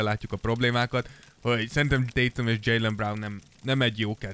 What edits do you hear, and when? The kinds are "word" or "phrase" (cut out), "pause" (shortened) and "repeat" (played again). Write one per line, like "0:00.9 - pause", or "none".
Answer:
0:02.1 - word